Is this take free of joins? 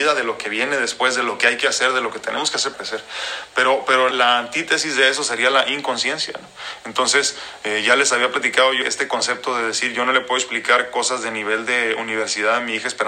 no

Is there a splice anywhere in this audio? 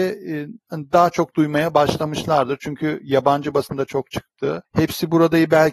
no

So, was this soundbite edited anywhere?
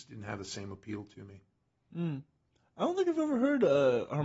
no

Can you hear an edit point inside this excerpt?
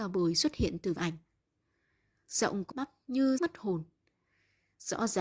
yes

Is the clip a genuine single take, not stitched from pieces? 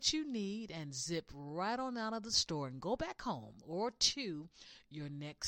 yes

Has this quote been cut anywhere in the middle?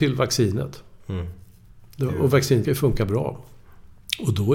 yes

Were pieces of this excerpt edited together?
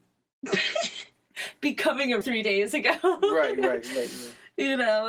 yes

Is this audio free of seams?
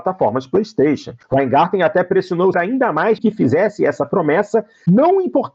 no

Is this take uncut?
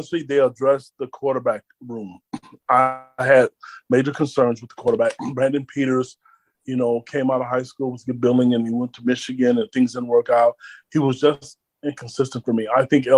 yes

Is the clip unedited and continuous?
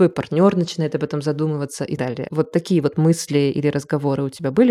no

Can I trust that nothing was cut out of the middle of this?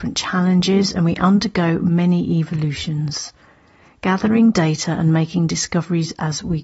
yes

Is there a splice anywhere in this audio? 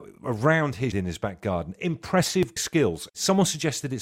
yes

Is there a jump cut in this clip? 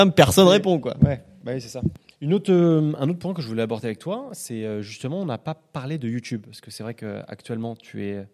yes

